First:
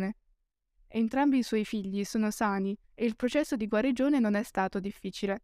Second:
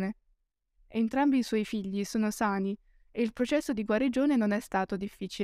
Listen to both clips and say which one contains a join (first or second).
first